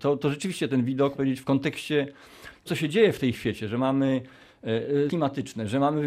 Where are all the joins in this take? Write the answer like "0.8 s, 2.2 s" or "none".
1.1 s, 2.7 s, 3.3 s, 5.1 s